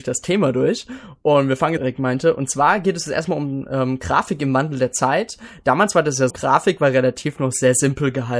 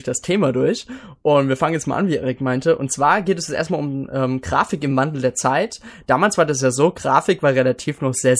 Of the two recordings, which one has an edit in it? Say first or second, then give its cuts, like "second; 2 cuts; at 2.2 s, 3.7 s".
first; 2 cuts; at 1.8 s, 6.3 s